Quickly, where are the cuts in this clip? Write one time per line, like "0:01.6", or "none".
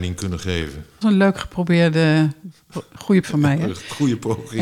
0:01.0
0:03.2